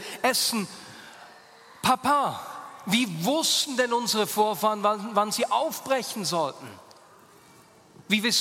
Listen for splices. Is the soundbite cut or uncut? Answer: uncut